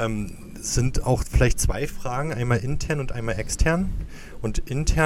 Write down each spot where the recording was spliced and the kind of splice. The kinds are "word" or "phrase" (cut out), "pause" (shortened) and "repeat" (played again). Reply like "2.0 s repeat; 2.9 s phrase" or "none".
none